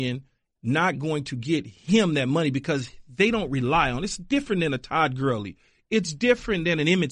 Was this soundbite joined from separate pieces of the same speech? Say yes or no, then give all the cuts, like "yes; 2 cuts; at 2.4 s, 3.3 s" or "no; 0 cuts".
no; 0 cuts